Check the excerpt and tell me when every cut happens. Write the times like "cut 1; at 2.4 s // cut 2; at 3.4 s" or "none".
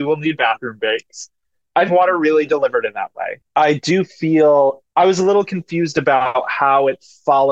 cut 1; at 1.9 s // cut 2; at 3.4 s // cut 3; at 4.9 s